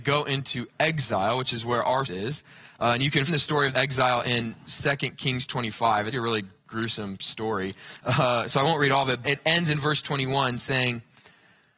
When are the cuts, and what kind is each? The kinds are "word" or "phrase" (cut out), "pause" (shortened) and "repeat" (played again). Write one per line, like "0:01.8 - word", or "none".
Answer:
0:02.0 - word
0:03.3 - word
0:03.7 - word
0:06.1 - word
0:09.2 - word